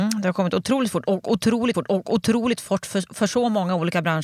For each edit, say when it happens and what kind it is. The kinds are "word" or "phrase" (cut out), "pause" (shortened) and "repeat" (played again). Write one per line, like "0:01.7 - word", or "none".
0:01.7 - repeat